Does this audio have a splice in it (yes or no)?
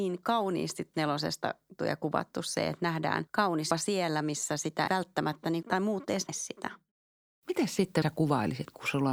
yes